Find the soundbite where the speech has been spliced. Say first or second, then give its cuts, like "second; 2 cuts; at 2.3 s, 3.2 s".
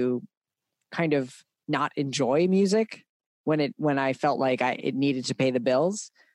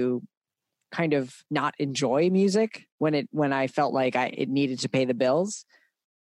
second; 2 cuts; at 1.5 s, 2.9 s